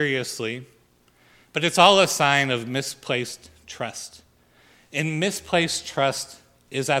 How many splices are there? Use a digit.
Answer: 0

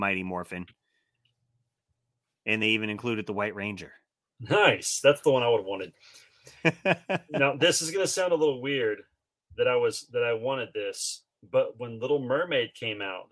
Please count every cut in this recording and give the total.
0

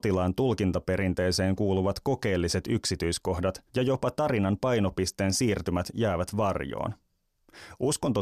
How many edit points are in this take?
1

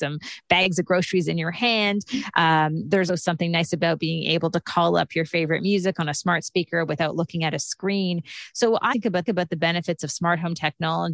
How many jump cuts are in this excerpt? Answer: 3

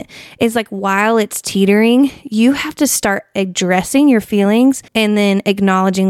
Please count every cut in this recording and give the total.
1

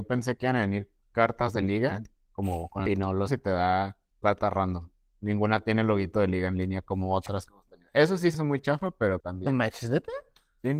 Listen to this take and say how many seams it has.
5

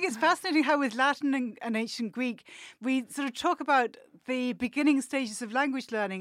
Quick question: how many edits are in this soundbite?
0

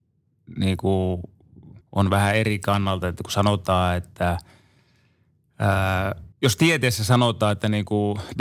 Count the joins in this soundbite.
2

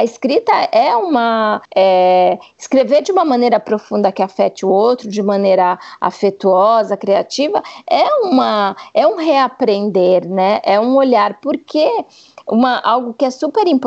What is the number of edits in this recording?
1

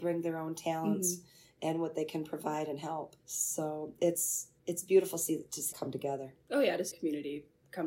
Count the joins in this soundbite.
4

